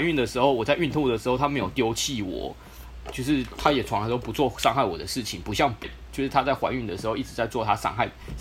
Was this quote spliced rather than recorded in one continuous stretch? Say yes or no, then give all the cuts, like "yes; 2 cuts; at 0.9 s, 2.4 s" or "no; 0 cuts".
yes; 1 cut; at 5.8 s